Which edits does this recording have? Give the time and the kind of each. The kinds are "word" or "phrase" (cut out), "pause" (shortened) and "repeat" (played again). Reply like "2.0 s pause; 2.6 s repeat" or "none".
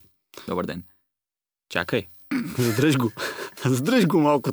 none

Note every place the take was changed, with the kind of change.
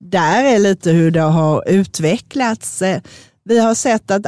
none

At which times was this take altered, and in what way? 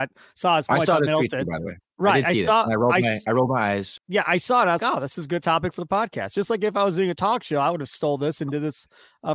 4.0 s word; 4.8 s word

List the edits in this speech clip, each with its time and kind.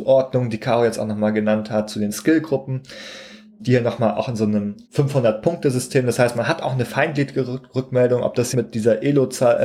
3.6 s word; 4.8 s pause; 8.5 s word

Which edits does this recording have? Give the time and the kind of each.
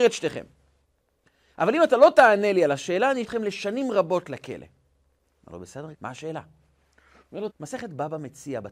3.2 s word; 5.9 s word; 7.5 s word

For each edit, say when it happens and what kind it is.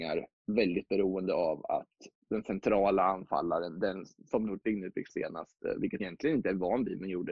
2.2 s pause; 4.5 s word; 5.1 s word; 6.0 s word

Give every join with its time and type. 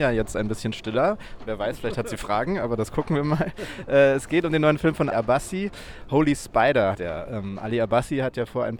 5.1 s word; 6.9 s word

